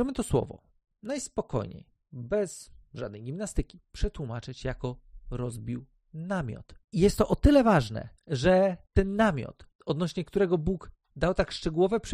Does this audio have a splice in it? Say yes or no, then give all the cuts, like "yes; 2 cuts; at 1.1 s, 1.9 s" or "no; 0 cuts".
no; 0 cuts